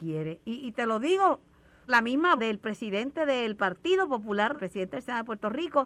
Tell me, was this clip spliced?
yes; 3 cuts; at 1.9 s, 2.4 s, 4.6 s

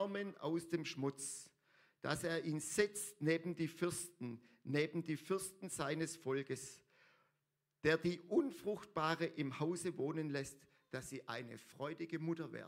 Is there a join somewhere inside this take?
no; 0 cuts

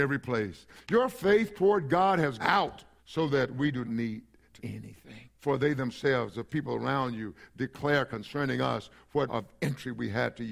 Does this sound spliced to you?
yes; 6 cuts; at 2.4 s, 3.0 s, 3.8 s, 4.6 s, 5.3 s, 9.3 s

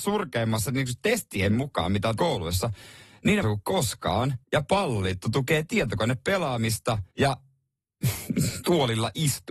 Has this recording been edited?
yes; 4 cuts; at 2.2 s, 3.4 s, 4.4 s, 7.1 s

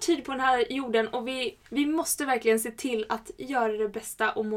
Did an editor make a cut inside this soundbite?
yes; 1 cut; at 1.7 s

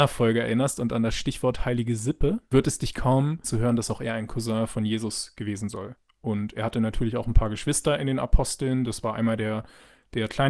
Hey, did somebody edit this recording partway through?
yes; 2 cuts; at 3.4 s, 5.7 s

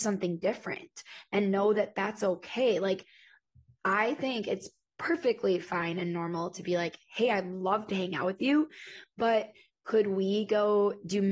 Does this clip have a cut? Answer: no; 0 cuts

